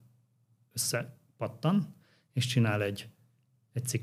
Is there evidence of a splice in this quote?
no; 0 cuts

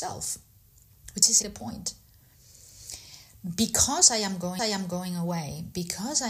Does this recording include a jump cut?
yes; 2 cuts; at 1.4 s, 4.6 s

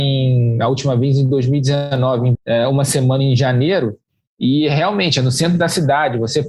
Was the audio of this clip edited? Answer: yes; 1 cut; at 2.3 s

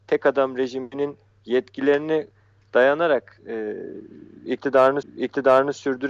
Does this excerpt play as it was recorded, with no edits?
no; 1 cut; at 5.0 s

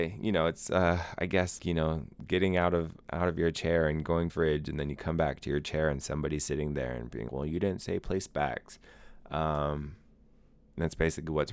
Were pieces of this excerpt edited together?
yes; 3 cuts; at 1.6 s, 4.3 s, 7.3 s

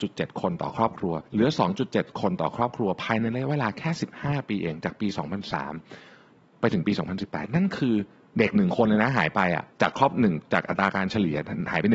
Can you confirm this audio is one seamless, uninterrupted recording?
no; 2 cuts; at 1.3 s, 9.7 s

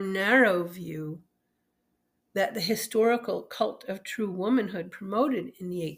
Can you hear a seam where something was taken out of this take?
no; 0 cuts

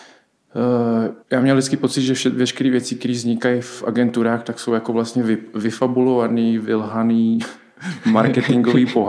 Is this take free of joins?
no; 1 cut; at 1.2 s

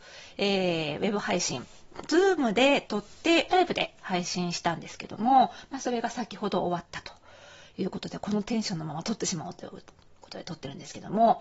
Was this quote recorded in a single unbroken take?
no; 1 cut; at 3.5 s

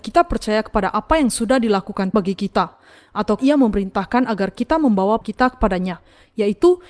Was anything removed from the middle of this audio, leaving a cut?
yes; 3 cuts; at 2.1 s, 3.4 s, 5.2 s

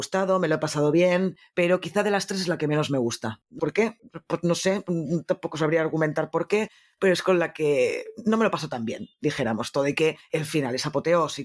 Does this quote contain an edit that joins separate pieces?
yes; 1 cut; at 3.6 s

